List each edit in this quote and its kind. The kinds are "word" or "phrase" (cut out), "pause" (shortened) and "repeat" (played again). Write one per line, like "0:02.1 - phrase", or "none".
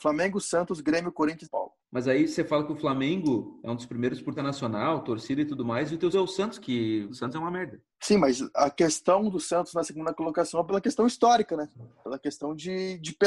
0:01.4 - phrase
0:01.8 - pause
0:04.4 - phrase
0:06.1 - word
0:07.1 - phrase
0:07.9 - pause